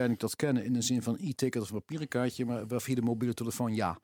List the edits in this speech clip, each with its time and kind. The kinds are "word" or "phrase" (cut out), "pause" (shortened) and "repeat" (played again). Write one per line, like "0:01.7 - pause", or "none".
none